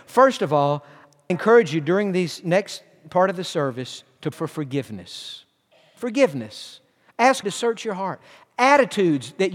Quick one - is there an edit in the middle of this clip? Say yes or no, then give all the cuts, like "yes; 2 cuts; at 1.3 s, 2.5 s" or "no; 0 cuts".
yes; 3 cuts; at 1.3 s, 4.3 s, 7.4 s